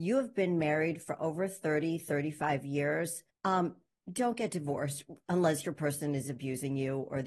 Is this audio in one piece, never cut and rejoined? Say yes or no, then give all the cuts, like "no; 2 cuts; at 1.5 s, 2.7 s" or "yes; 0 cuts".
no; 1 cut; at 3.3 s